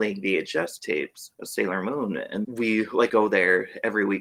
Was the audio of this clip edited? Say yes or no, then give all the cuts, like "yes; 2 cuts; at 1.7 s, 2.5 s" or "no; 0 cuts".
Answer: yes; 2 cuts; at 2.4 s, 3.1 s